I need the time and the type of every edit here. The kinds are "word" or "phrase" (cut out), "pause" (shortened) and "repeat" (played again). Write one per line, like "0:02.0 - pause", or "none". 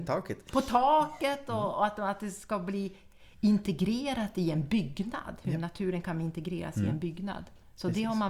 none